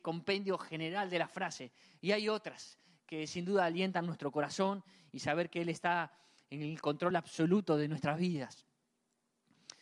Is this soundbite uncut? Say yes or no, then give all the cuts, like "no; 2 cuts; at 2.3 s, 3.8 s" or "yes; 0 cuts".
yes; 0 cuts